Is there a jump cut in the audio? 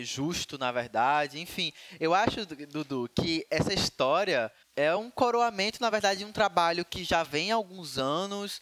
no; 0 cuts

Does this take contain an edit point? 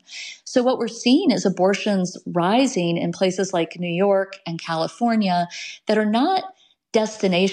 no; 0 cuts

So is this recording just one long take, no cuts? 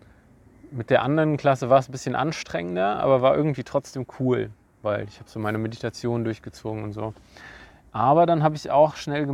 yes; 0 cuts

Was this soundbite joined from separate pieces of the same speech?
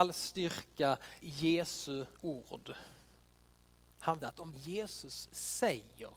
yes; 4 cuts; at 1.2 s, 2.1 s, 4.2 s, 4.5 s

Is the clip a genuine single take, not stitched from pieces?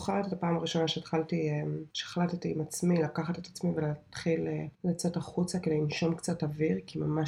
no; 2 cuts; at 1.9 s, 4.7 s

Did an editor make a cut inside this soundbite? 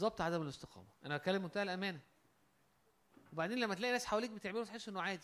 yes; 1 cut; at 1.0 s

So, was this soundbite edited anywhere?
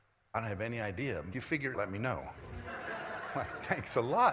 yes; 2 cuts; at 1.3 s, 1.7 s

